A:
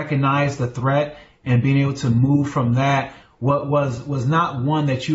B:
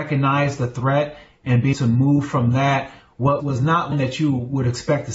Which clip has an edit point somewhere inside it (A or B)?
B